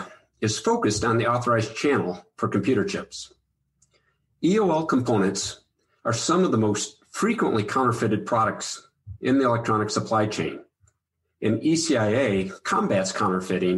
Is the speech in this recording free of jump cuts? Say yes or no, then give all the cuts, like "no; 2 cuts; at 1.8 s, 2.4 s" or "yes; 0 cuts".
yes; 0 cuts